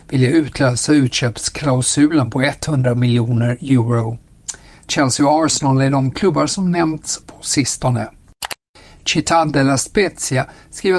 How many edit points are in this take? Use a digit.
1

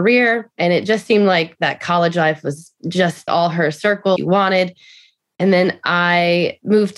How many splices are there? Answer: 2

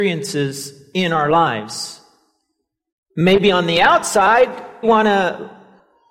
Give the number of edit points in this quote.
1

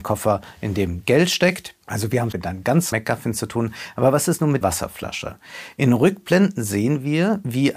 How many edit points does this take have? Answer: 4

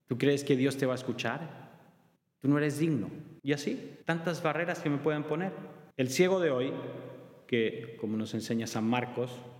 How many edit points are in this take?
4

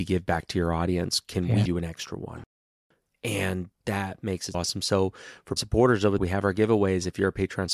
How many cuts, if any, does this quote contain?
4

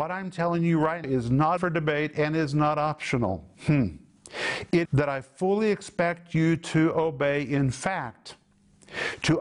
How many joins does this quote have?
4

